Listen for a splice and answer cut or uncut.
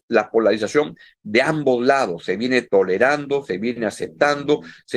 uncut